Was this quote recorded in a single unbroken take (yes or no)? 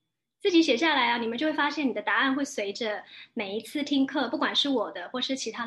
yes